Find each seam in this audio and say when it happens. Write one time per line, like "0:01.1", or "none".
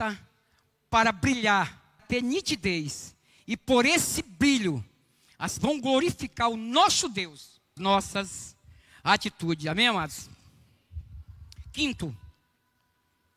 0:02.0
0:05.6
0:07.8